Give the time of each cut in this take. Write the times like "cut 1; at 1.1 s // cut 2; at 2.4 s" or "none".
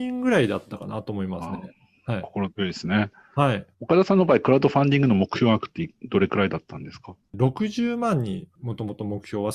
cut 1; at 3.7 s